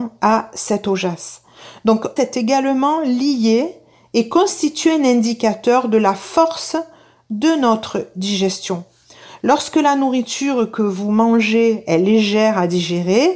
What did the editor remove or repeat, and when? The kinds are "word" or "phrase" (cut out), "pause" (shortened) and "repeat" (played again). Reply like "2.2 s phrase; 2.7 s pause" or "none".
2.2 s word